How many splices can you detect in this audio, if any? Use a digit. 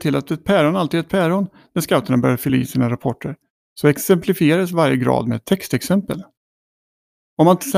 0